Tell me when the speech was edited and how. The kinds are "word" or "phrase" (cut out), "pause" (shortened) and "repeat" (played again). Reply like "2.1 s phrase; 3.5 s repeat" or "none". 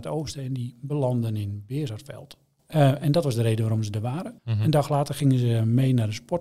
4.4 s pause

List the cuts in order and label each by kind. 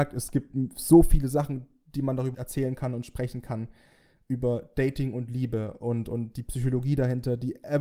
2.3 s word

